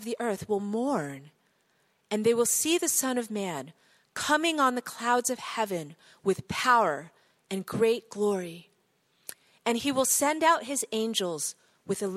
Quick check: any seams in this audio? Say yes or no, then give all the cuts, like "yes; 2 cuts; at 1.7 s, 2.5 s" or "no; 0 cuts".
no; 0 cuts